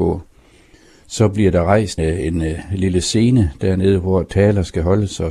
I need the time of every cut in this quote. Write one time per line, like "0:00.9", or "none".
0:02.0